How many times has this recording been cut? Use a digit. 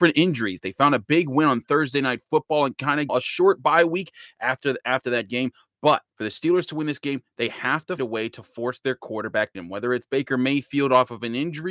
4